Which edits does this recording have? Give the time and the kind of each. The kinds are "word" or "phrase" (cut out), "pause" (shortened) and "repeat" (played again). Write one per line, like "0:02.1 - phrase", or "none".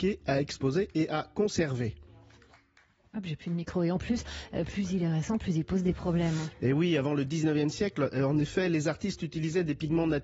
none